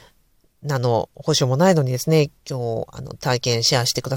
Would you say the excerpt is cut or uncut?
cut